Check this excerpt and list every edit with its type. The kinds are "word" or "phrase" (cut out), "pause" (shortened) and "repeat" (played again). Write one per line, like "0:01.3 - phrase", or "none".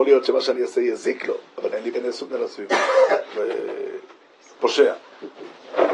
0:01.5 - pause
0:01.9 - phrase
0:02.3 - word
0:03.3 - phrase